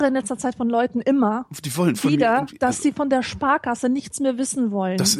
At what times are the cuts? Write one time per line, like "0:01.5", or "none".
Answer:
none